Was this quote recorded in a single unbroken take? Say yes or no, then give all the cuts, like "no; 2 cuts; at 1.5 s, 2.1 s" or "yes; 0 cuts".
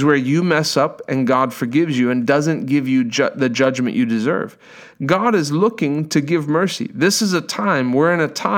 yes; 0 cuts